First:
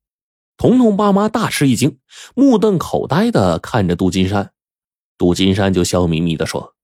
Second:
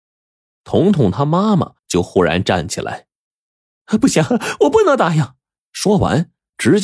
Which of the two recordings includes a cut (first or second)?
second